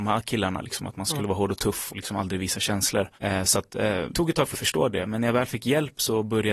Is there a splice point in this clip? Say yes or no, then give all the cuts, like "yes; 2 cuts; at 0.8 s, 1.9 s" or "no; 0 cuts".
yes; 4 cuts; at 1.9 s, 3.1 s, 4.1 s, 4.5 s